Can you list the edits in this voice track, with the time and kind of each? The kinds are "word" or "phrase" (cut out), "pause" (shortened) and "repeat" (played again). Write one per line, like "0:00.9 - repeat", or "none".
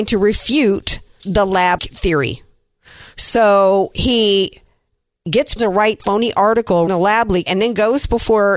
0:01.2 - word
0:01.8 - word
0:05.6 - word
0:06.0 - word
0:06.9 - word
0:07.4 - word